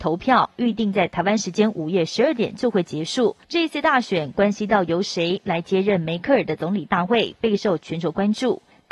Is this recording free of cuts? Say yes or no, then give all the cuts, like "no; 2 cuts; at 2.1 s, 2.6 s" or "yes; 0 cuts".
no; 1 cut; at 3.4 s